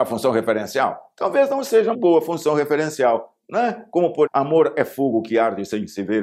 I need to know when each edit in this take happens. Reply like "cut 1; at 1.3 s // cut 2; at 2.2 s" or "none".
cut 1; at 1.9 s // cut 2; at 4.3 s